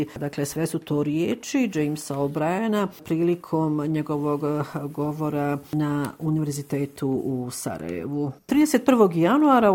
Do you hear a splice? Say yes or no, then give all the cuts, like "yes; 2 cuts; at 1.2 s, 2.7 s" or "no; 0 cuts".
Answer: no; 0 cuts